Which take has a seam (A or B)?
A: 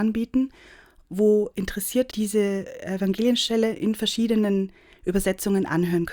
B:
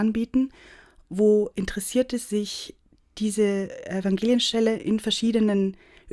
A